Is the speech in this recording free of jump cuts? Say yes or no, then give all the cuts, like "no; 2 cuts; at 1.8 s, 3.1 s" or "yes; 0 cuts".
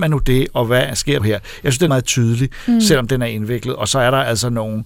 no; 2 cuts; at 1.2 s, 1.9 s